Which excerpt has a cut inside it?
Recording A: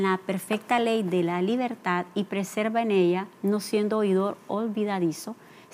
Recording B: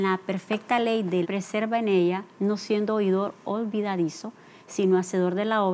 B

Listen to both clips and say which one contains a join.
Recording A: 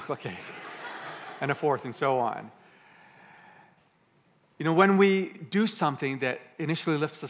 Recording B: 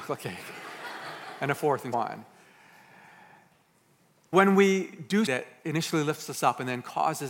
B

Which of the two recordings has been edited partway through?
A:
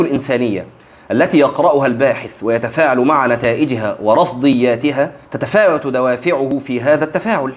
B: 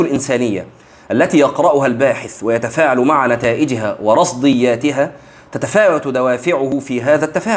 A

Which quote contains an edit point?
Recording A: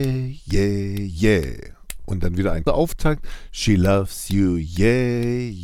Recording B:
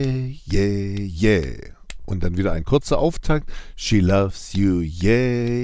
A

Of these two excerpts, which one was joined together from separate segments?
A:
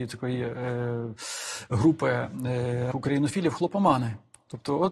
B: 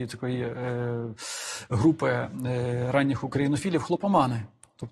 A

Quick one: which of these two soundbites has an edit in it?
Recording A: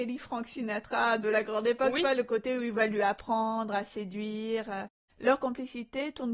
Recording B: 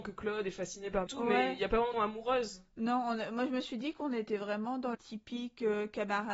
B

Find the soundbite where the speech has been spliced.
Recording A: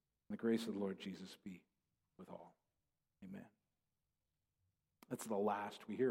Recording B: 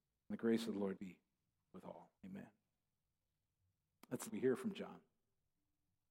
B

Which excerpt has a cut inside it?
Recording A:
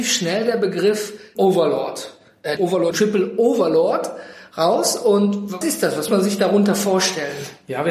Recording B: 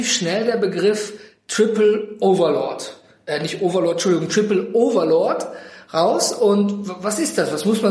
A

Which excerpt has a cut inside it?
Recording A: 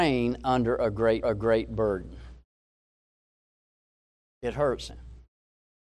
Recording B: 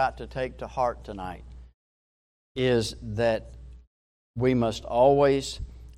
A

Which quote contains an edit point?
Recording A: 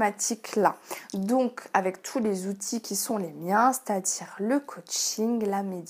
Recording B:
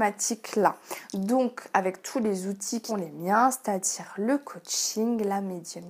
B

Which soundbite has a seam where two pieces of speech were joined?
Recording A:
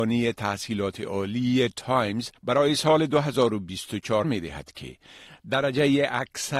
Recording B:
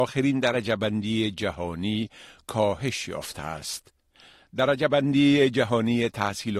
A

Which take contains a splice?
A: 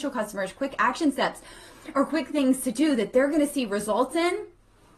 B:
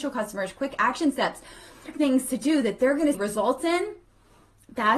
B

